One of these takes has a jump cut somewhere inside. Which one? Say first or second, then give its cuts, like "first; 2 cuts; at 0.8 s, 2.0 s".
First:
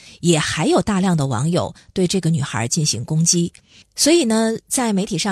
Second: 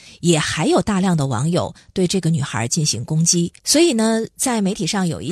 second; 1 cut; at 3.6 s